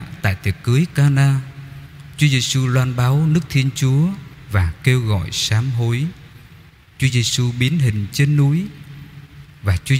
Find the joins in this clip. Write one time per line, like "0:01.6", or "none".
none